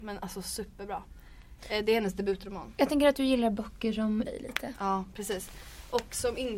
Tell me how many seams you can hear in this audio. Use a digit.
1